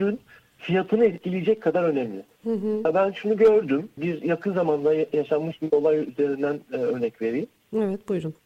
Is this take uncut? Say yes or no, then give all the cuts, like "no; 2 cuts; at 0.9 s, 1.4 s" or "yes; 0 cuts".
yes; 0 cuts